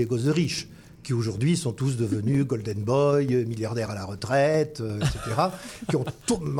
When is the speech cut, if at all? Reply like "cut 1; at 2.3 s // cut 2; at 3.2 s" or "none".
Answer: none